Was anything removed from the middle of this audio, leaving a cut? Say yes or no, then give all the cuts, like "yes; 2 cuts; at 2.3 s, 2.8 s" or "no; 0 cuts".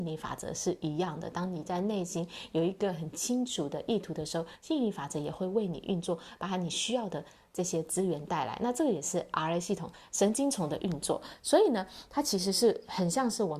no; 0 cuts